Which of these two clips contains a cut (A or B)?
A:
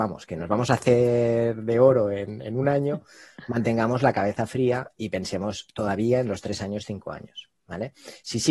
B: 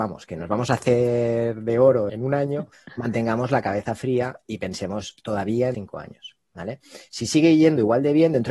B